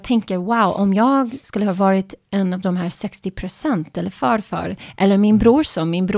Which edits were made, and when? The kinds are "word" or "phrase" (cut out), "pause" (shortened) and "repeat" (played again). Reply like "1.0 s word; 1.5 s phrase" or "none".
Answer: none